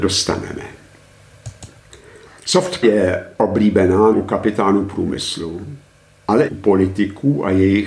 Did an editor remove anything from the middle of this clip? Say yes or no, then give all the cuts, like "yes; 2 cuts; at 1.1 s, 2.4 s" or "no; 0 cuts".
yes; 3 cuts; at 2.8 s, 4.1 s, 6.5 s